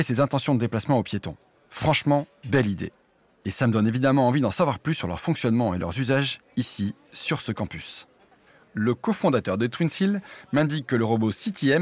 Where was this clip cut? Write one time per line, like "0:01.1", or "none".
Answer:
none